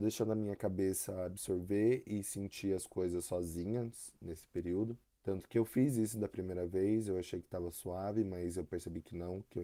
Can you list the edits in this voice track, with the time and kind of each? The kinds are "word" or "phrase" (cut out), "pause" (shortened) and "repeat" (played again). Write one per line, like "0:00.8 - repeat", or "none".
0:05.0 - pause